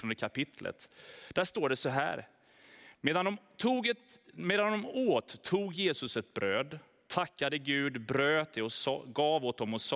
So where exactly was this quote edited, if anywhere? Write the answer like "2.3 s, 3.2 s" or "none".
none